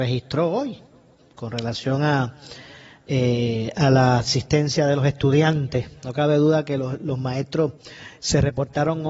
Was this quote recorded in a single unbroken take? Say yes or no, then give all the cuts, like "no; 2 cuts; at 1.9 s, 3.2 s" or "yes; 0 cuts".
yes; 0 cuts